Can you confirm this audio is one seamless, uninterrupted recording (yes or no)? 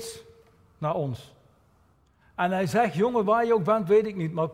yes